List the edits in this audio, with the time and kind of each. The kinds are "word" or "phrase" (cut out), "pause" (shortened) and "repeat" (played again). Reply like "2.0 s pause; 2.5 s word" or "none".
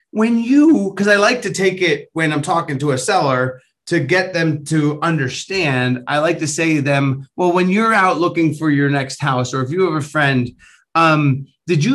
none

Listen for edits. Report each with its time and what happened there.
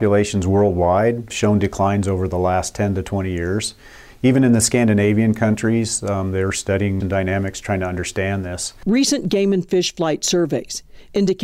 1.3 s word; 7.0 s phrase

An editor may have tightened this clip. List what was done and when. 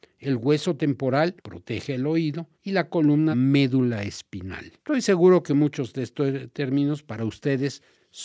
1.4 s pause; 2.5 s pause; 3.3 s phrase; 4.8 s pause

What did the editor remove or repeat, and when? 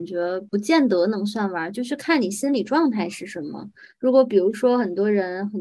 none

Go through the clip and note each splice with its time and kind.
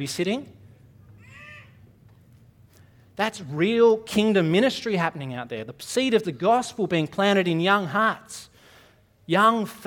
none

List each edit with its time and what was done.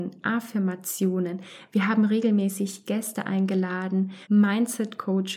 4.2 s pause

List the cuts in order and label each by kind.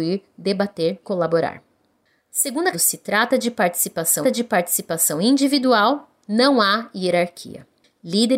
1.0 s word; 2.7 s phrase; 4.2 s repeat

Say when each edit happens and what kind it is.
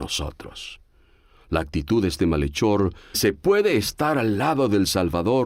3.1 s phrase

